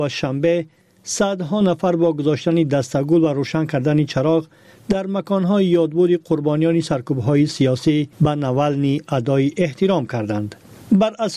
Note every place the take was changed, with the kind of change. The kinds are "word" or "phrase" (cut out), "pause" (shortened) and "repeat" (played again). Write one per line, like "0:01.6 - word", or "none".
0:08.1 - pause